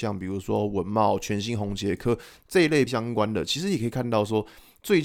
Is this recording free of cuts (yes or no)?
no